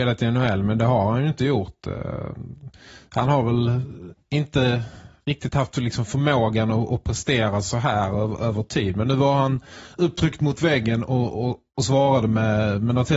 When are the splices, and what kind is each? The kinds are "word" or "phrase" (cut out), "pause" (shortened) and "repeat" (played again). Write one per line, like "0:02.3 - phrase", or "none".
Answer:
none